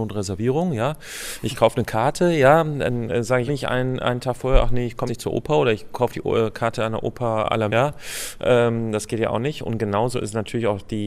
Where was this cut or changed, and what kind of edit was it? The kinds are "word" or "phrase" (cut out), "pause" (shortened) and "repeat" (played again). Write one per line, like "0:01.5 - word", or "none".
0:03.5 - word
0:05.1 - word
0:07.7 - word